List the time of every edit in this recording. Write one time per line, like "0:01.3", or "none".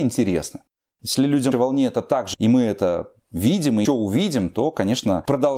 0:01.5
0:02.3
0:03.8

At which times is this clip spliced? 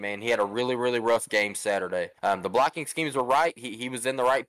0:02.2

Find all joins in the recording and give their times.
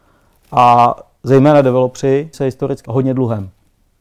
0:02.3
0:02.9

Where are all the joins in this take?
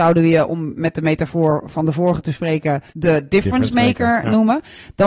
0:02.9

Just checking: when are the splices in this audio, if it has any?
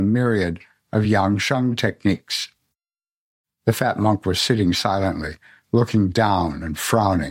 none

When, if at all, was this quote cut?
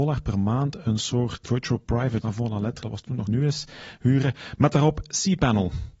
0:01.4
0:02.2
0:02.8
0:03.3

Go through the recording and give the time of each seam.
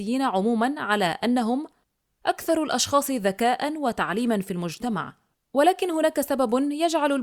none

